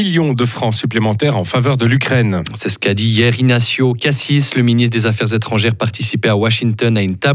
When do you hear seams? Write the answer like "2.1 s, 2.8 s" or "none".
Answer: none